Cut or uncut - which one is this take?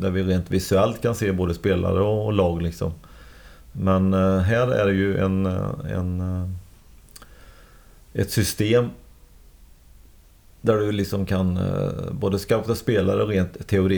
uncut